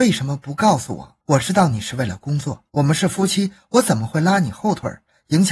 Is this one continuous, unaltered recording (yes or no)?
no